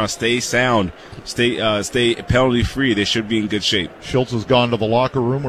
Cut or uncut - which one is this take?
uncut